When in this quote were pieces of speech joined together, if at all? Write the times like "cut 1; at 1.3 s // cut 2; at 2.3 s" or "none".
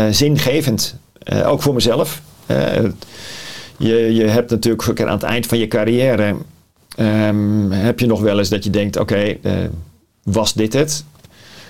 none

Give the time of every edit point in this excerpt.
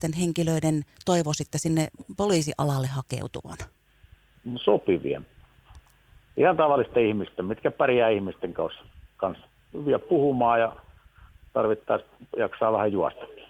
none

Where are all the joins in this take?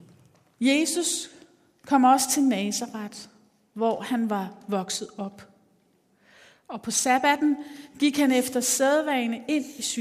none

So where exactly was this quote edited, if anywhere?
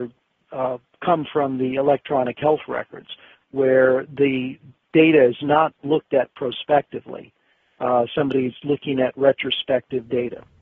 none

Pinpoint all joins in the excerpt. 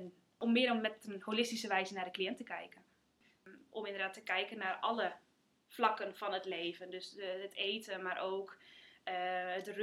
none

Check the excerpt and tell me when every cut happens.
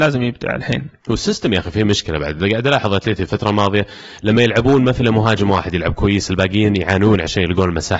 none

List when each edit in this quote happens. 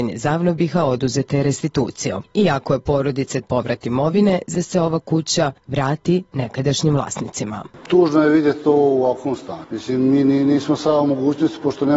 cut 1; at 3.4 s // cut 2; at 4.5 s

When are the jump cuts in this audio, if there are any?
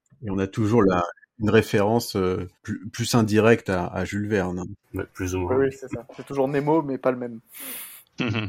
cut 1; at 2.6 s // cut 2; at 4.8 s

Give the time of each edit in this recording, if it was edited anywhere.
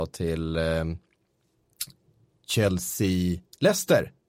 none

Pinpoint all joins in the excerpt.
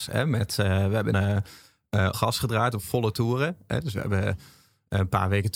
cut 1; at 1.1 s // cut 2; at 2.1 s

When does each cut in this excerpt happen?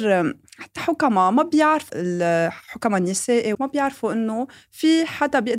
cut 1; at 1.9 s // cut 2; at 3.5 s

